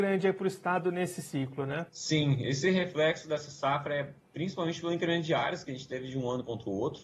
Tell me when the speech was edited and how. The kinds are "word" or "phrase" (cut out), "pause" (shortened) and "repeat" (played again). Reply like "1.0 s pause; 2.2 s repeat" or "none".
1.9 s pause